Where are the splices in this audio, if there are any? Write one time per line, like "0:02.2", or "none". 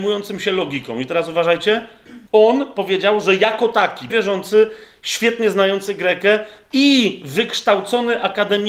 0:02.3
0:04.1